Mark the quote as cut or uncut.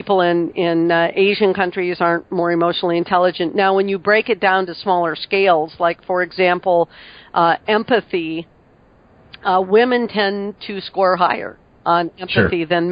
uncut